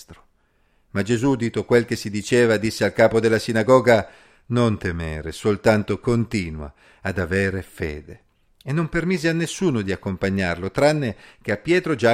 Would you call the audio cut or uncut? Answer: uncut